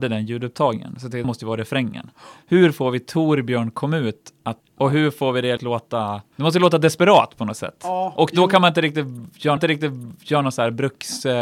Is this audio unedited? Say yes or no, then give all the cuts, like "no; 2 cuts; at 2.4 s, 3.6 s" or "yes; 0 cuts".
no; 5 cuts; at 1.2 s, 4.6 s, 5.6 s, 6.3 s, 9.6 s